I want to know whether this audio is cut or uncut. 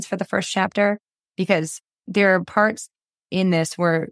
uncut